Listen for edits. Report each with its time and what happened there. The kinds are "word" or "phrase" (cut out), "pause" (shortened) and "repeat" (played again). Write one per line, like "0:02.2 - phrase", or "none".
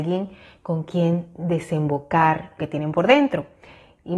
0:02.6 - word